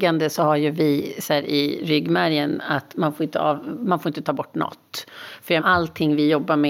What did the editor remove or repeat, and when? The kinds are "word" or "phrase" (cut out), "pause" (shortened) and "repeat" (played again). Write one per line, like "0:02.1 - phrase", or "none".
0:05.6 - word